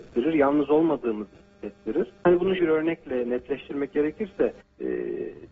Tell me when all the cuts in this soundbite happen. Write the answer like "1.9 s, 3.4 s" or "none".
2.2 s, 2.6 s, 4.6 s